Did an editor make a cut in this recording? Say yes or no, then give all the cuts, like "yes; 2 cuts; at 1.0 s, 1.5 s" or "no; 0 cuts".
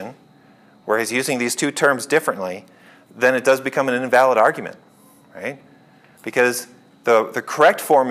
no; 0 cuts